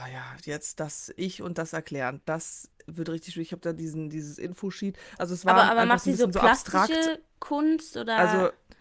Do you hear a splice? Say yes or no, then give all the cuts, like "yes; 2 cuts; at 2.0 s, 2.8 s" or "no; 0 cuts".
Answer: no; 0 cuts